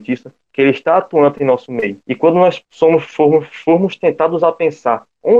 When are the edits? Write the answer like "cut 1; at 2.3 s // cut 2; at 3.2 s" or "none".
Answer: cut 1; at 2.0 s // cut 2; at 2.7 s